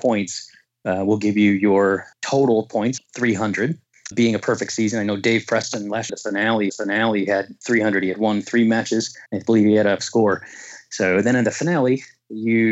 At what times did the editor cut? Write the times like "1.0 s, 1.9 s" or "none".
2.1 s, 3.0 s, 4.1 s, 6.1 s, 6.7 s, 9.3 s, 10.0 s